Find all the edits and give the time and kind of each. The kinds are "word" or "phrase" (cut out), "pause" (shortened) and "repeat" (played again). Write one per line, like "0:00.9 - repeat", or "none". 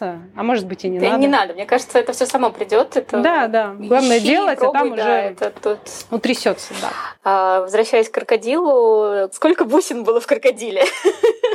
none